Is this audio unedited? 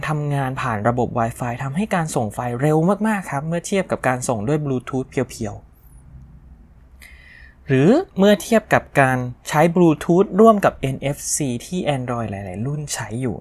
no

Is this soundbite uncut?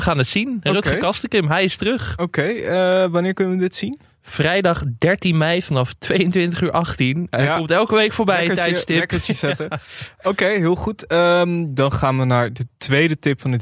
yes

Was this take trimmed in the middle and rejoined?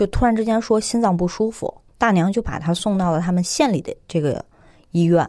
yes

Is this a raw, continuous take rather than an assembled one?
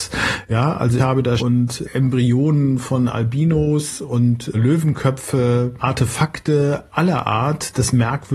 no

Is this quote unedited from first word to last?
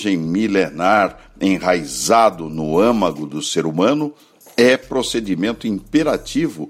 yes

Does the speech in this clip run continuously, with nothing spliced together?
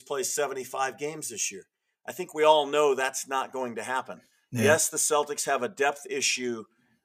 yes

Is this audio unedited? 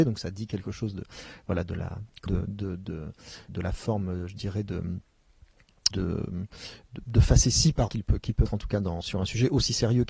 no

